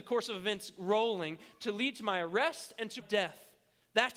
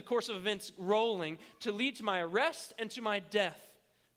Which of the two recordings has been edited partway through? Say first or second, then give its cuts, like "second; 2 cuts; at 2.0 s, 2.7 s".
first; 1 cut; at 3.0 s